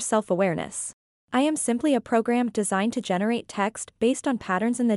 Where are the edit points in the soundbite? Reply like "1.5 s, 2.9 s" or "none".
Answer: none